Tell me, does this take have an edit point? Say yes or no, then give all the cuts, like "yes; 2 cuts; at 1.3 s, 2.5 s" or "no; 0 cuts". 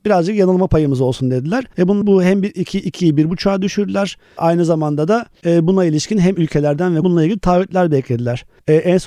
yes; 2 cuts; at 2.0 s, 7.0 s